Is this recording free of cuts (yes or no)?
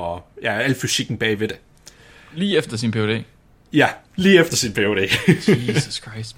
yes